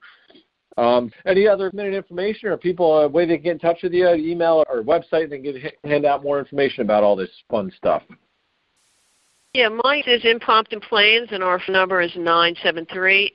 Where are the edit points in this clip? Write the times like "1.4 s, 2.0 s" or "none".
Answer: 1.1 s, 1.7 s, 4.6 s, 10.0 s, 11.7 s